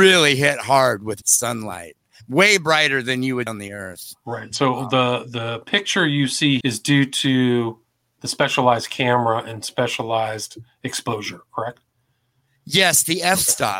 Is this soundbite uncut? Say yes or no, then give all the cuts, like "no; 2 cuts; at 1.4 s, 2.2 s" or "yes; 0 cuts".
no; 3 cuts; at 1.2 s, 3.5 s, 6.6 s